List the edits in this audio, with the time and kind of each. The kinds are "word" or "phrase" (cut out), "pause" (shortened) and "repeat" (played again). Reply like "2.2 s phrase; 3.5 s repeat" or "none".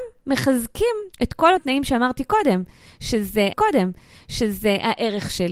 1.1 s pause; 1.6 s word; 3.5 s repeat